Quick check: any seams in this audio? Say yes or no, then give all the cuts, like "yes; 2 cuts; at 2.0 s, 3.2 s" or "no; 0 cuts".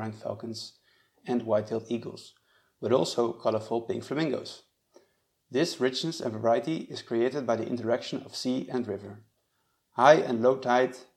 no; 0 cuts